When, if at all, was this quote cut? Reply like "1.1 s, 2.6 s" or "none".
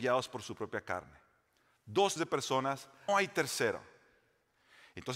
2.2 s, 3.1 s